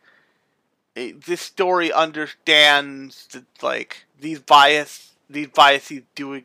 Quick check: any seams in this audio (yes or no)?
yes